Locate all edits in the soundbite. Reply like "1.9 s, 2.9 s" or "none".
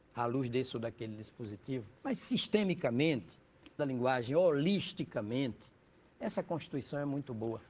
2.0 s, 3.8 s